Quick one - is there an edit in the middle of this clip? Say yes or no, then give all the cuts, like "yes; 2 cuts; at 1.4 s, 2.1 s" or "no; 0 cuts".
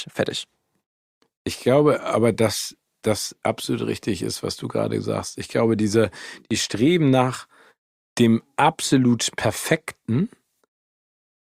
no; 0 cuts